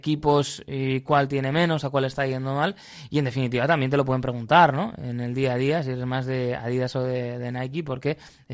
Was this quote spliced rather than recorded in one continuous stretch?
no; 0 cuts

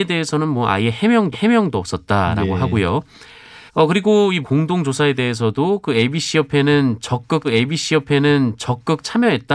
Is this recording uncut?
no; 4 cuts; at 1.3 s, 3.7 s, 4.4 s, 7.4 s

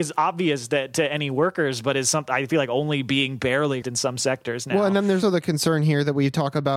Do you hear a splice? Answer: yes; 2 cuts; at 3.8 s, 5.2 s

